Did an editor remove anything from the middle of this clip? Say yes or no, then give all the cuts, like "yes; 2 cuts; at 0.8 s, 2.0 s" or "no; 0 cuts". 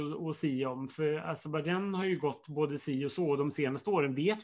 no; 0 cuts